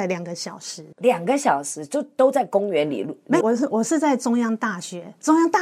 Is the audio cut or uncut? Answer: cut